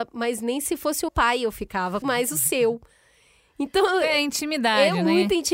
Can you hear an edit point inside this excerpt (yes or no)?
yes